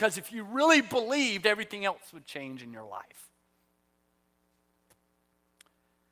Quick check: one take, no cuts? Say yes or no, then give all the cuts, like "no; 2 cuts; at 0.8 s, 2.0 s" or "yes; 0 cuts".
yes; 0 cuts